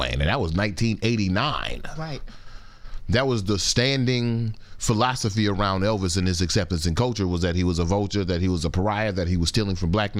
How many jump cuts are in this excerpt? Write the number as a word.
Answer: zero